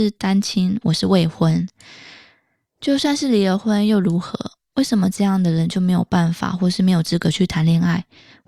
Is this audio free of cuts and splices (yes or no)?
yes